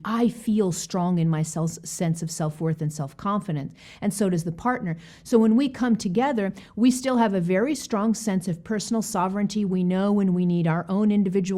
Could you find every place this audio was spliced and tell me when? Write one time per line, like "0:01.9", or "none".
none

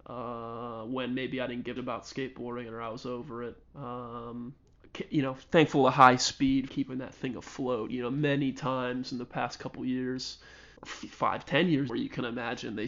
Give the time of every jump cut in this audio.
0:01.8
0:03.6
0:06.7
0:10.8
0:11.9

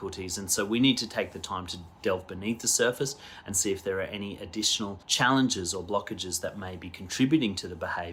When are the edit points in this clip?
0:05.0

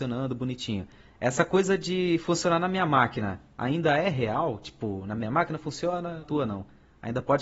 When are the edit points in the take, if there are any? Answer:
0:06.2

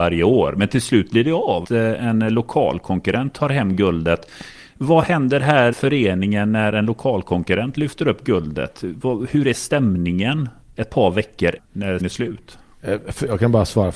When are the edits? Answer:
0:01.6
0:05.7
0:11.6
0:12.0

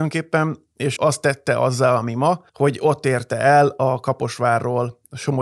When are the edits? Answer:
0:01.0
0:02.5

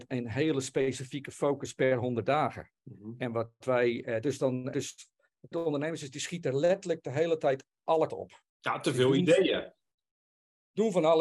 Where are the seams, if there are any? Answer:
0:02.8
0:04.7
0:05.5
0:08.1
0:08.5

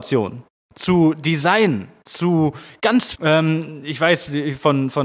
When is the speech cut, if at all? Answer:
0:03.1

